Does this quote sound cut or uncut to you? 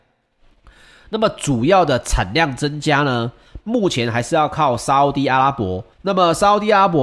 cut